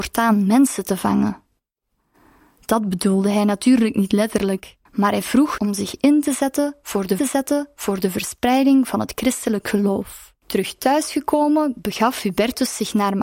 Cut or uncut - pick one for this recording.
cut